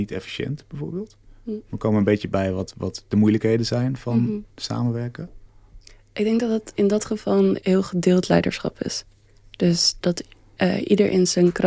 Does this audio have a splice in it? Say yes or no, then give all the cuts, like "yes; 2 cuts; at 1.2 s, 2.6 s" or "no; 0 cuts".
no; 0 cuts